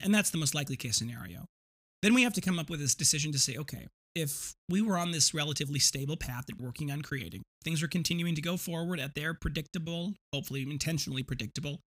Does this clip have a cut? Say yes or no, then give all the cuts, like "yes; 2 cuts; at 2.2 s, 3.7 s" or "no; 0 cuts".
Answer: yes; 4 cuts; at 1.8 s, 4.6 s, 6.6 s, 10.2 s